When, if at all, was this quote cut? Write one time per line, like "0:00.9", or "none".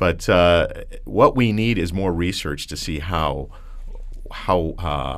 none